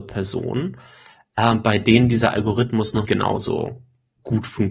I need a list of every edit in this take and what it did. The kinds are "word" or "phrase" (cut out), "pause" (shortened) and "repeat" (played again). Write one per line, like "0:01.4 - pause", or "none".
0:03.0 - word